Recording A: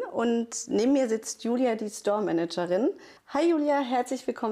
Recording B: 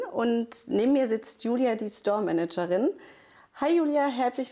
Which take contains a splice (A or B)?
A